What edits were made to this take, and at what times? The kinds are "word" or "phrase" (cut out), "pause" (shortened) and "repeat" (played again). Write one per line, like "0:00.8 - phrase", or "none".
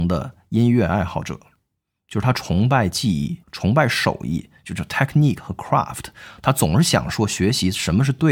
0:03.4 - pause